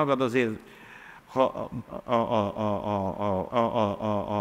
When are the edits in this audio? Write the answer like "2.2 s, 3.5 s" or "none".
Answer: 1.2 s, 3.5 s

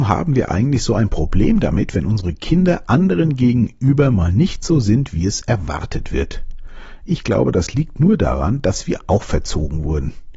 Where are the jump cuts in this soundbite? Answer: none

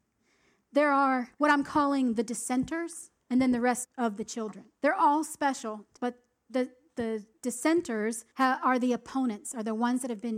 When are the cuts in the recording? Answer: 1.3 s, 3.2 s, 3.8 s, 4.8 s, 6.0 s, 8.3 s

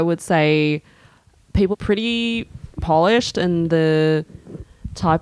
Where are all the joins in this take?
1.7 s, 2.8 s

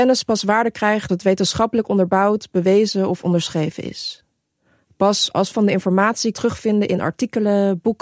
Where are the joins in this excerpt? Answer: 1.1 s, 5.5 s, 6.3 s

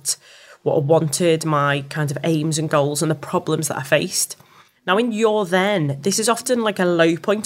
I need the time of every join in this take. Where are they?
none

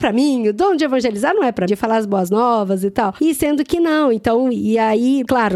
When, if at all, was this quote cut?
1.7 s

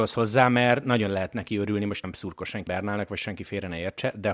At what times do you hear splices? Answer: 2.0 s, 2.7 s

